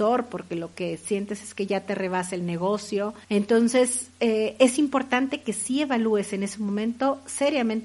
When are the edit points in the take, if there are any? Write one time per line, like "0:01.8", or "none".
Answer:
0:03.2